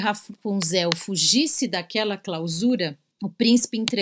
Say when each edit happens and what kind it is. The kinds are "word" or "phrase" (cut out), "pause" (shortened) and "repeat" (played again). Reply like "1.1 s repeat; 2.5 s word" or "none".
3.1 s pause